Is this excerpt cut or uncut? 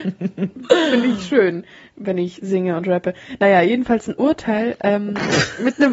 uncut